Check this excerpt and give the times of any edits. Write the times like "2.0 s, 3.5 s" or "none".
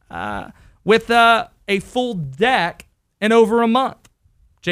3.1 s